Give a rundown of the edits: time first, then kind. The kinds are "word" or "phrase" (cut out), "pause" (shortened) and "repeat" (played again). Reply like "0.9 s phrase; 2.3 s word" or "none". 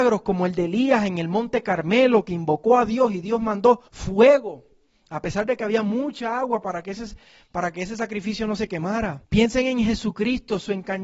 3.9 s pause; 9.2 s pause